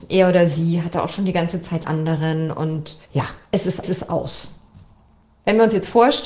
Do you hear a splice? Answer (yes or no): yes